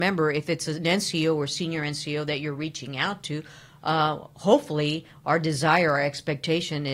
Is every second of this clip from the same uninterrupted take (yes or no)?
yes